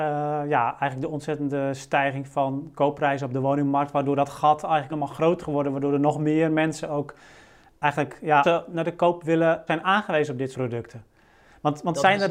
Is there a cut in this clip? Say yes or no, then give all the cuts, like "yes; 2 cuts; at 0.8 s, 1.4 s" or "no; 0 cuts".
yes; 5 cuts; at 4.9 s, 5.4 s, 8.4 s, 9.7 s, 10.5 s